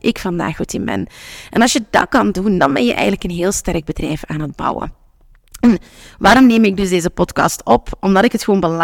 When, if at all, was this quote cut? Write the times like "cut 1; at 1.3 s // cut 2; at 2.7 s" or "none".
none